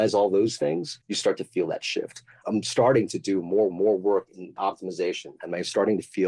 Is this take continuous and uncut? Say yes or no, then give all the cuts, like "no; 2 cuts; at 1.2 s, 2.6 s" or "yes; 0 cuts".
no; 3 cuts; at 1.0 s, 3.7 s, 4.6 s